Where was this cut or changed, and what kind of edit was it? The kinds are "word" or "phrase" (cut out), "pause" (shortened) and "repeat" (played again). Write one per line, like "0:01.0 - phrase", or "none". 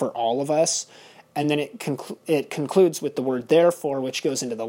none